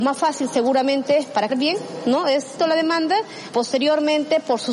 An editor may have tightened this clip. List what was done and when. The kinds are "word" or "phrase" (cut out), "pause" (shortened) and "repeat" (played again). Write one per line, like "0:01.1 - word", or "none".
0:01.5 - word
0:02.6 - word
0:03.5 - word